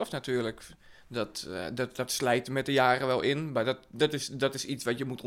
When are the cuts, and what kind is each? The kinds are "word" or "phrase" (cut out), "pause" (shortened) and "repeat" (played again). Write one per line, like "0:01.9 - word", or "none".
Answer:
none